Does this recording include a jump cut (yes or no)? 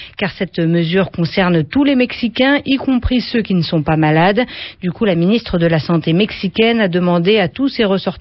no